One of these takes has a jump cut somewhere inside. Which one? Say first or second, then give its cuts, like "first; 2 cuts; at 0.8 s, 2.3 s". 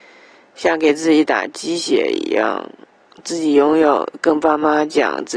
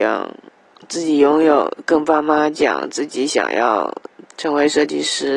second; 1 cut; at 4.3 s